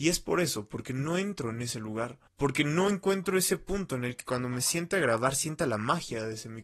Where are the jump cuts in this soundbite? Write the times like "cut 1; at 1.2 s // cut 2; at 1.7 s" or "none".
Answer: cut 1; at 2.3 s